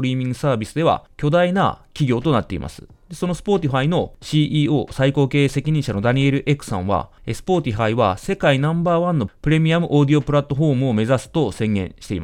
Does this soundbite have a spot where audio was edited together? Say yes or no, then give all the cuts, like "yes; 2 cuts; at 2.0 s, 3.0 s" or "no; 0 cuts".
no; 0 cuts